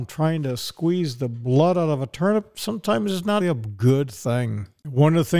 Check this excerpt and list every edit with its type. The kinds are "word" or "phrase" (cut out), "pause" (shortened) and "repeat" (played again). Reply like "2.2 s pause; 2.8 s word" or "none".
3.4 s word